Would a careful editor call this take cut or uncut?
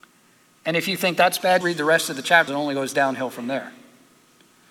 cut